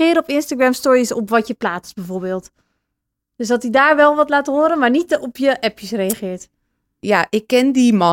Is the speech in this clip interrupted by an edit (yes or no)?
no